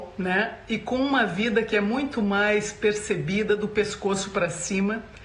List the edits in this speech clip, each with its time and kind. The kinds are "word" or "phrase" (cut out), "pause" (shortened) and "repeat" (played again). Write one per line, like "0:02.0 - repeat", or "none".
none

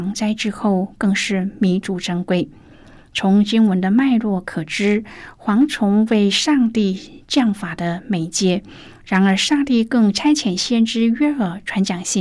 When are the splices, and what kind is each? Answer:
none

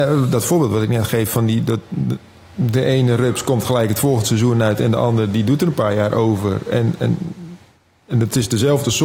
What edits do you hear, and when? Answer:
none

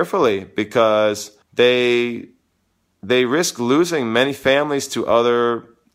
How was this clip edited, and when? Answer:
0:01.4 - pause

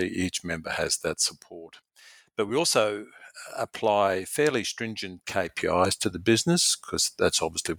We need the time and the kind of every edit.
none

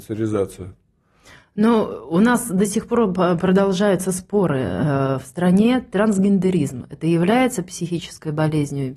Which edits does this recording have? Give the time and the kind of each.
none

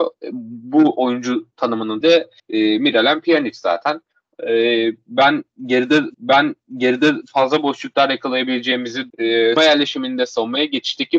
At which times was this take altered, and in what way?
0:02.0 - word
0:02.4 - pause
0:06.1 - repeat
0:09.1 - word
0:09.6 - word

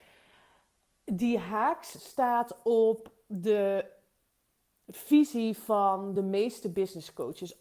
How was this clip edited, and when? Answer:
none

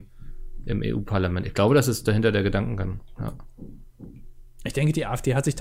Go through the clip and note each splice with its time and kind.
none

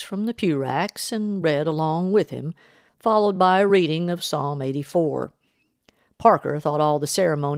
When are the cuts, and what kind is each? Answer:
none

